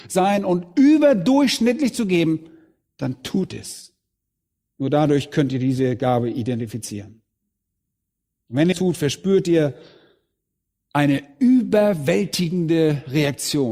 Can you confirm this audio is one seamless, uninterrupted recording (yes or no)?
no